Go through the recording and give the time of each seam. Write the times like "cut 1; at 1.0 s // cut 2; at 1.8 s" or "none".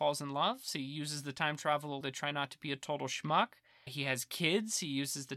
cut 1; at 2.0 s // cut 2; at 3.9 s